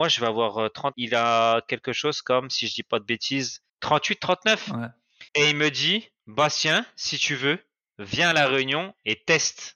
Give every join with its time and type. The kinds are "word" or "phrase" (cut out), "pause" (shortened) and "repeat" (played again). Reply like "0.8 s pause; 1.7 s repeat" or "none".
0.9 s phrase; 3.7 s pause; 5.3 s pause; 6.2 s pause